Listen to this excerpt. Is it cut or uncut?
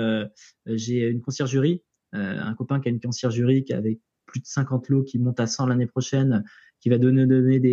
uncut